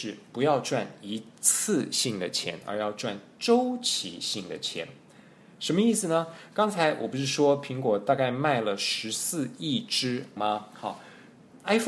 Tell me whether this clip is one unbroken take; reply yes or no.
no